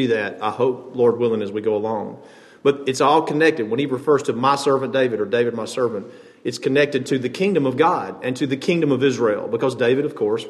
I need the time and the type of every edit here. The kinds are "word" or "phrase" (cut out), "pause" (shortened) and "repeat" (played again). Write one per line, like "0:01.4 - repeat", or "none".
none